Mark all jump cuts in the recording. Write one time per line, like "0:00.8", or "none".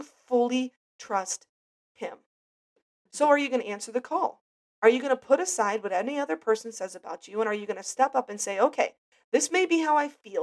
0:04.5